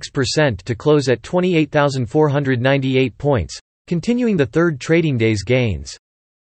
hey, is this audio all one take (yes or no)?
yes